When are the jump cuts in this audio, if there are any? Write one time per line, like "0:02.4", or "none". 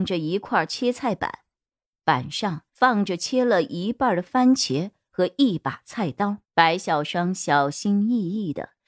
0:02.7
0:06.4